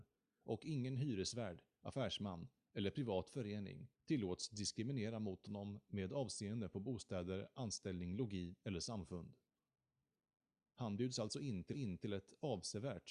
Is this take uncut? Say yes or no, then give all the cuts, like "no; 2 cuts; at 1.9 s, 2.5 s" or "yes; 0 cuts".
no; 2 cuts; at 3.9 s, 11.7 s